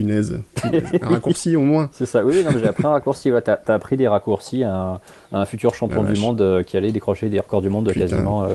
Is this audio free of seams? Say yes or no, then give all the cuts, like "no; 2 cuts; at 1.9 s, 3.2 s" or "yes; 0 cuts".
yes; 0 cuts